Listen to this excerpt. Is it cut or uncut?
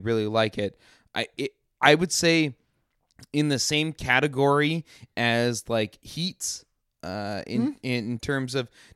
uncut